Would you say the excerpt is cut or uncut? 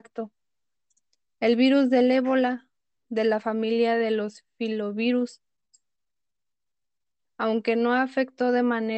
uncut